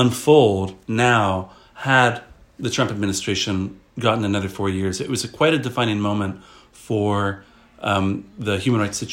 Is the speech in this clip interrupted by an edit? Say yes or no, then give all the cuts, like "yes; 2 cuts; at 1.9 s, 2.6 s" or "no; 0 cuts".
no; 0 cuts